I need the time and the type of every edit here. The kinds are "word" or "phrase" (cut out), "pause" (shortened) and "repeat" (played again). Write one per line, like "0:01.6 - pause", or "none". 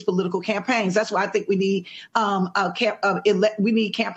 none

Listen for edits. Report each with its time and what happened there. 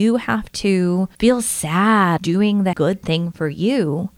0:01.1 - pause
0:02.2 - word
0:02.7 - word

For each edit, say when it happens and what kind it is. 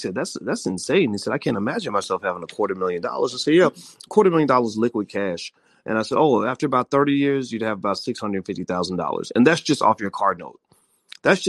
none

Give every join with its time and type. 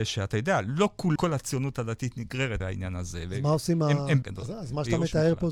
0:01.2 - word
0:02.6 - word
0:04.2 - phrase

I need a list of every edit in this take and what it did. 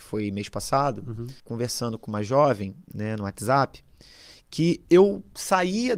0:01.4 - pause

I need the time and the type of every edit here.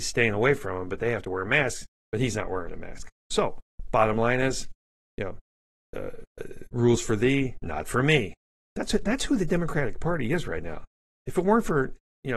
none

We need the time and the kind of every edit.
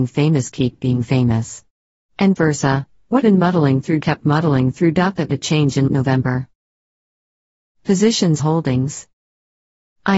0:02.4 - word
0:03.2 - word
0:04.0 - word
0:05.3 - word
0:05.9 - word
0:08.4 - word

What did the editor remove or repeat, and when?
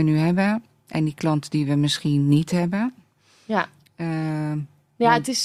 none

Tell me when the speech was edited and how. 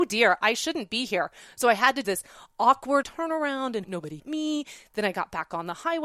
0:02.0 - word
0:03.0 - word
0:03.8 - word
0:04.2 - word

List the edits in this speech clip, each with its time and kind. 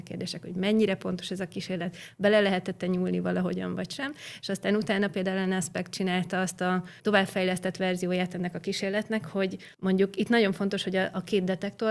0:07.0 - pause
0:09.7 - pause

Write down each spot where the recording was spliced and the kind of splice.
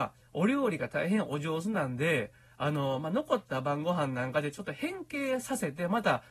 none

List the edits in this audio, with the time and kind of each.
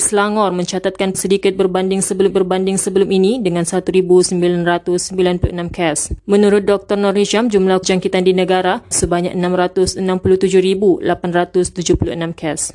0:01.1 - word
0:02.3 - repeat
0:07.8 - word
0:08.9 - word

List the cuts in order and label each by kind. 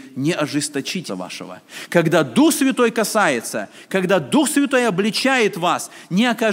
0:01.1 - word

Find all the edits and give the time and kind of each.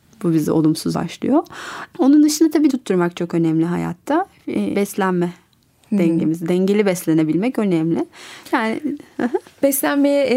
0:00.9 - word
0:02.7 - word
0:04.7 - word

